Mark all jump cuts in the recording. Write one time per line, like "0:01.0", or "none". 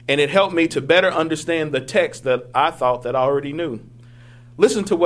none